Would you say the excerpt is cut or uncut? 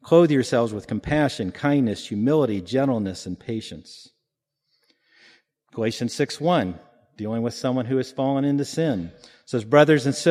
uncut